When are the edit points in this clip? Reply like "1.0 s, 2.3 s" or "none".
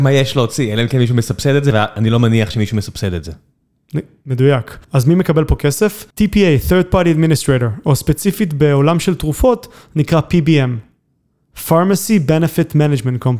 4.8 s, 6.1 s